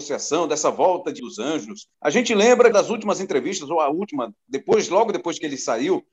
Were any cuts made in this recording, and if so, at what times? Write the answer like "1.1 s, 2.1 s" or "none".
1.2 s, 1.9 s, 2.7 s, 4.4 s

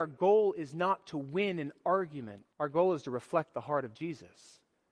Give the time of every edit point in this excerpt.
2.5 s

